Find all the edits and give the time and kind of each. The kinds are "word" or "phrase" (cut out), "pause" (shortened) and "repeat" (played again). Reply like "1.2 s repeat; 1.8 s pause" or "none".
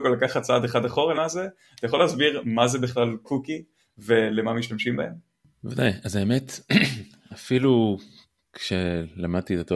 1.1 s phrase